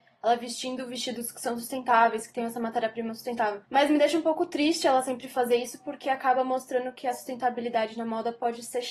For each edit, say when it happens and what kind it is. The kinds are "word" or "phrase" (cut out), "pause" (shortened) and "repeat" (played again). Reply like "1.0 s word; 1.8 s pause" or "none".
3.6 s pause